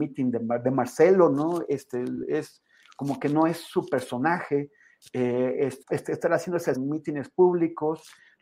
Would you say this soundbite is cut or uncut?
cut